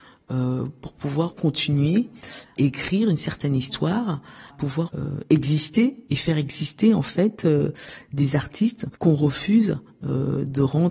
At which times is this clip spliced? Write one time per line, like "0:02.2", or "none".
0:02.6
0:04.5
0:06.1
0:09.0